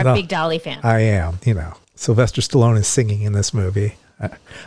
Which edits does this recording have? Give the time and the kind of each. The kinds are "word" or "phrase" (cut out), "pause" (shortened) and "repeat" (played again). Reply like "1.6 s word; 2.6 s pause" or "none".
1.4 s word; 1.8 s pause